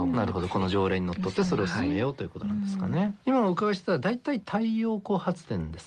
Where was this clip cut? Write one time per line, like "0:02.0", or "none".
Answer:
none